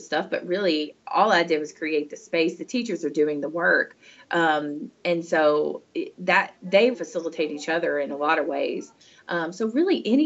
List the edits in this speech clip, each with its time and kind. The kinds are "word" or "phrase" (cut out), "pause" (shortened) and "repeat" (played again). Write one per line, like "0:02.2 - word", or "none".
0:06.9 - word